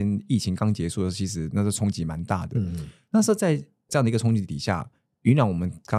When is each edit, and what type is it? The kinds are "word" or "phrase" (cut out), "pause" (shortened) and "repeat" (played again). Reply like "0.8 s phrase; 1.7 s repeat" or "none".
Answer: none